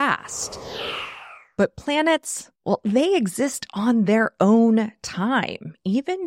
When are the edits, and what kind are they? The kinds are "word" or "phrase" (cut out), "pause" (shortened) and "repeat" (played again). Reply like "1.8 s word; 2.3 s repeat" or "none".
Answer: 2.6 s pause